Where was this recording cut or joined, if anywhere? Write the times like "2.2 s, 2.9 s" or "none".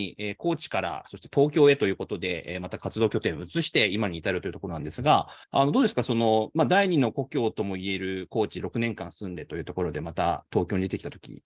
5.4 s